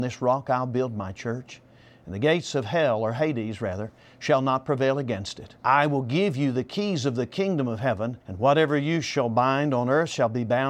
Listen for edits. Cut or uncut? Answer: cut